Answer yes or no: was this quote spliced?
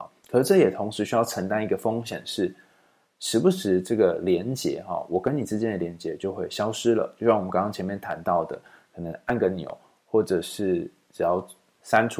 no